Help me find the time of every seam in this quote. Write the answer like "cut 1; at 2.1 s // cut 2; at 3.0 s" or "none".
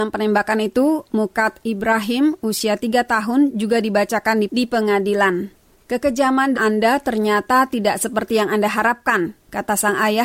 cut 1; at 6.5 s